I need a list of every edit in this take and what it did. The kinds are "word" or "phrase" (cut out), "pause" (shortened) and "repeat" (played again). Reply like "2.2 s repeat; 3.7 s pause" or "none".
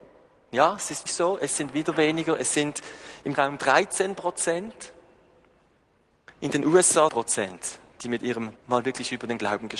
1.1 s word; 3.3 s word; 6.3 s pause; 7.1 s phrase; 8.6 s word